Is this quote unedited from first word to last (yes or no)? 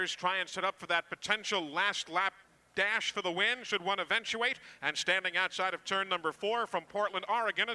yes